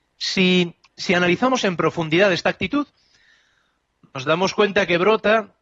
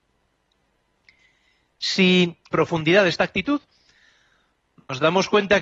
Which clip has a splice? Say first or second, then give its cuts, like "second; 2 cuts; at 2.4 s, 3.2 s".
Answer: second; 1 cut; at 2.5 s